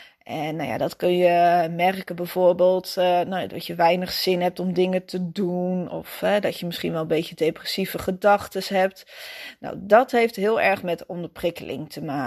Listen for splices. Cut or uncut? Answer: uncut